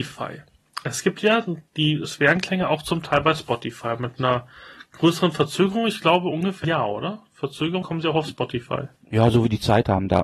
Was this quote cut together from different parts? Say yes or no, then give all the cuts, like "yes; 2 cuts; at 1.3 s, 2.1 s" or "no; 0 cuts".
yes; 3 cuts; at 6.6 s, 7.8 s, 9.0 s